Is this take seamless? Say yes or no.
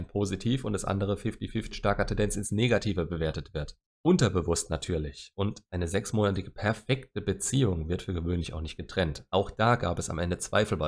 no